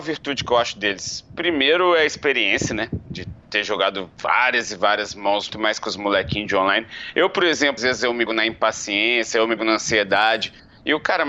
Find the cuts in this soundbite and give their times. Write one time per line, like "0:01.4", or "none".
0:03.4
0:04.1
0:05.5
0:07.8
0:08.3
0:09.6